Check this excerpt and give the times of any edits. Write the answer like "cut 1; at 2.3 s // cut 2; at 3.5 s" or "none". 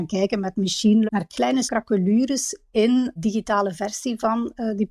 cut 1; at 1.1 s // cut 2; at 1.7 s // cut 3; at 3.2 s